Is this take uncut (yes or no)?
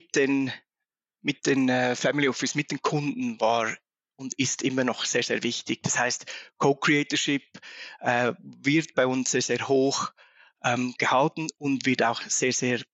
yes